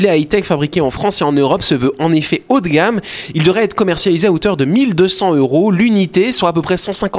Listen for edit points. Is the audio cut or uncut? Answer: uncut